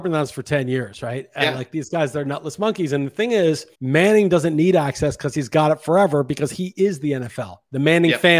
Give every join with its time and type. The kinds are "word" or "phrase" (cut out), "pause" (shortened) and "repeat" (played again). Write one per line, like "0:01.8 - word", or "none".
0:03.7 - pause